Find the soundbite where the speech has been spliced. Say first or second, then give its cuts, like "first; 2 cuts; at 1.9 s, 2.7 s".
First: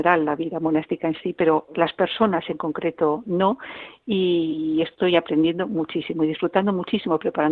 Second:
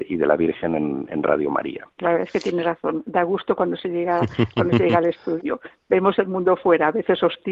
second; 1 cut; at 1.9 s